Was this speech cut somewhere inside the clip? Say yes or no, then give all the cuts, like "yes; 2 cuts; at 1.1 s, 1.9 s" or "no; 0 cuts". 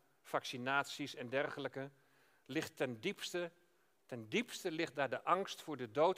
no; 0 cuts